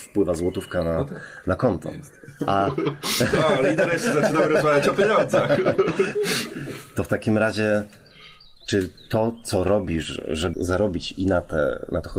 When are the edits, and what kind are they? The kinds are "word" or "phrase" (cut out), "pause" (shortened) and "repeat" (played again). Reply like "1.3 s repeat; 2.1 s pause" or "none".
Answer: 10.5 s word